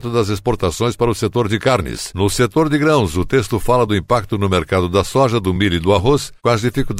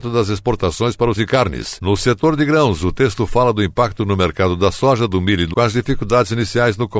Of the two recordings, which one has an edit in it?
second; 2 cuts; at 1.2 s, 5.5 s

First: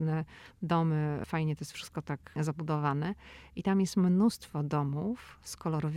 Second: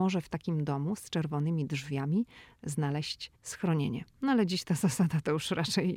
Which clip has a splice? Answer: second; 1 cut; at 3.4 s

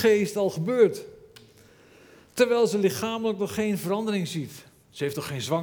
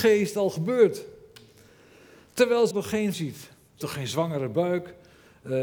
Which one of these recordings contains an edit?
second; 3 cuts; at 2.7 s, 3.1 s, 3.8 s

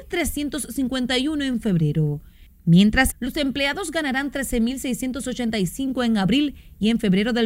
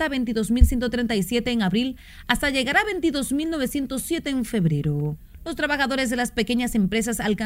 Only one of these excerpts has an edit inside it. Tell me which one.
first; 1 cut; at 3.1 s

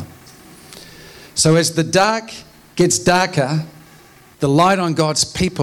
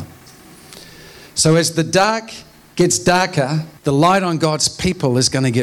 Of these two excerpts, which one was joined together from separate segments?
second; 1 cut; at 3.8 s

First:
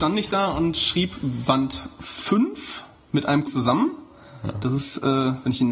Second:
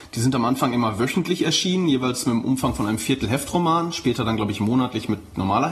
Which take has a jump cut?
first; 1 cut; at 3.5 s

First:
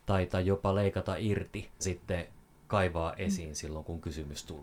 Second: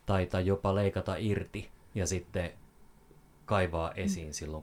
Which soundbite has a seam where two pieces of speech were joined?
first; 2 cuts; at 1.8 s, 2.5 s

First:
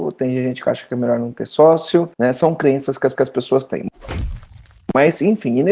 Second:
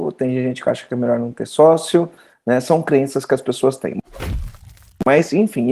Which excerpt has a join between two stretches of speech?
first; 2 cuts; at 2.1 s, 3.2 s

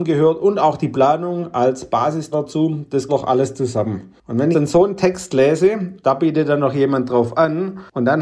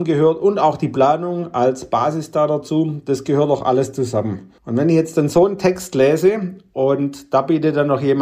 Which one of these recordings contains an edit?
first; 4 cuts; at 2.3 s, 3.1 s, 4.5 s, 6.0 s

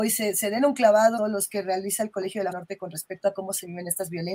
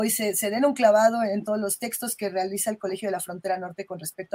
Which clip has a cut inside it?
first; 3 cuts; at 1.2 s, 1.5 s, 2.5 s

